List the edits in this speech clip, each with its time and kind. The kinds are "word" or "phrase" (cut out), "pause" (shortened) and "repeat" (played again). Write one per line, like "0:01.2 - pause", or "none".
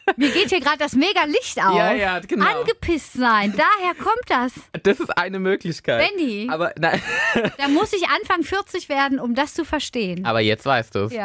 none

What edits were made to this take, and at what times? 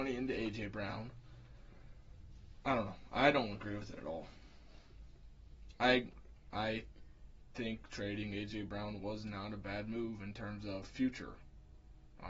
none

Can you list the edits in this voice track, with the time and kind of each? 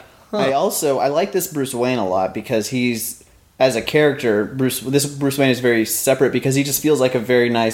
none

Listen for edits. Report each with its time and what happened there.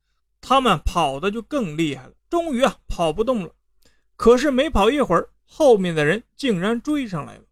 0:02.2 - pause

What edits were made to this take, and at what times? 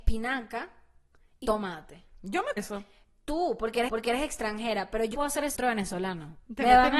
0:01.4 - word
0:02.6 - word
0:03.9 - repeat
0:05.1 - word
0:05.5 - word

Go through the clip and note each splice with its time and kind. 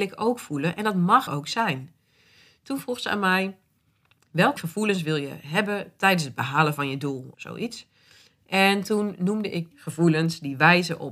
0:01.3 - word
0:04.6 - word
0:07.3 - word
0:09.7 - word

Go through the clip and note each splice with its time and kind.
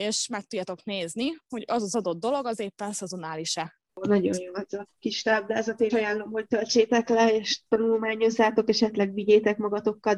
0:04.9 - pause
0:05.9 - word

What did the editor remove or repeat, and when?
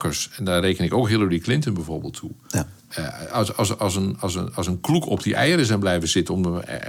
0:02.8 - pause

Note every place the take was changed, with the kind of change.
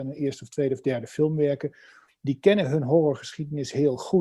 none

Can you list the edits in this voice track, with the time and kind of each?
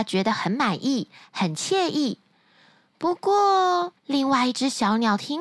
0:04.0 - pause

